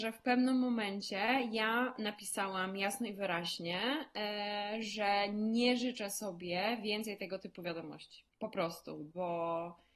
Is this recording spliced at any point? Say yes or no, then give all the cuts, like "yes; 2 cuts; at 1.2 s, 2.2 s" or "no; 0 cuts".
yes; 1 cut; at 8.3 s